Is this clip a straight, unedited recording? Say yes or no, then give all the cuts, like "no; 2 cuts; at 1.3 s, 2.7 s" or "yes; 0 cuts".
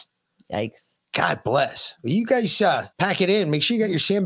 no; 1 cut; at 2.9 s